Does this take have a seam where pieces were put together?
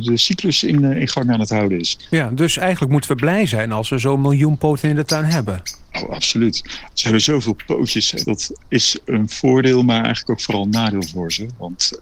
yes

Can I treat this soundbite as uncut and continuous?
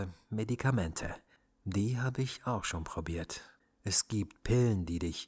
yes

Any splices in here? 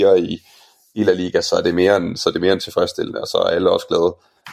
no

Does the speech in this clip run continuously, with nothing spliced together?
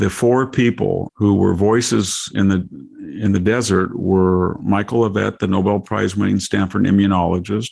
no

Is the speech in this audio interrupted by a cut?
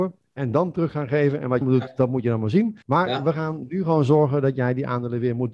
yes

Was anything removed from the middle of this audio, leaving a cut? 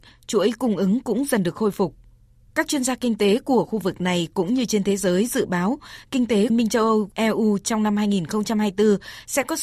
yes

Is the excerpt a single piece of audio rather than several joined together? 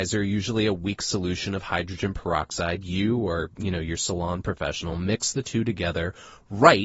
yes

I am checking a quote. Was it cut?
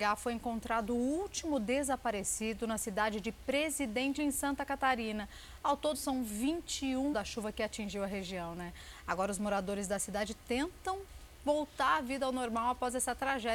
yes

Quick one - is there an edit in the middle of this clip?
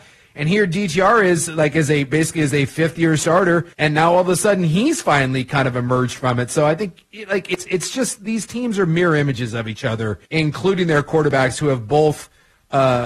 yes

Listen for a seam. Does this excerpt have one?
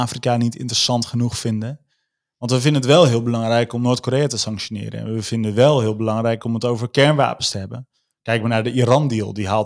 no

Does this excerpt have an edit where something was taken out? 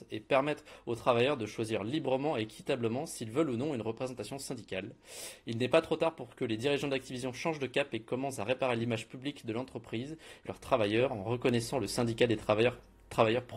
yes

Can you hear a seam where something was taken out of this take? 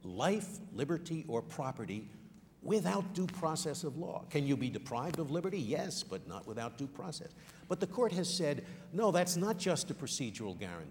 yes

